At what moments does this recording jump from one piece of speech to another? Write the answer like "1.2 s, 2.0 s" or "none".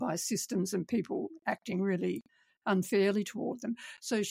none

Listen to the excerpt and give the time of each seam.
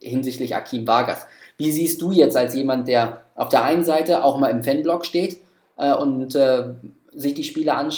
none

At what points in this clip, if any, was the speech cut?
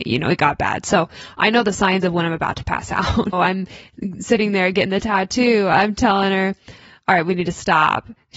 3.3 s

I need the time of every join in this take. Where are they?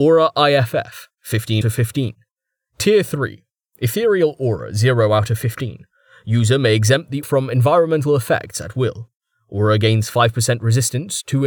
1.6 s, 7.2 s

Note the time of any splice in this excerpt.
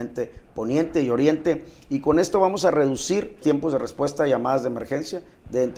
3.4 s

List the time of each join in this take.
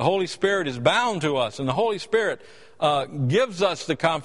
none

